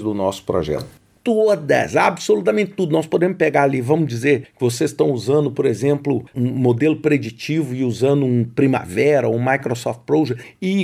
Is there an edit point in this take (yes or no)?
no